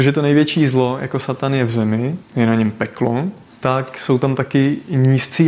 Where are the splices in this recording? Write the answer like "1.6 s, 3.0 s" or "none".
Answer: none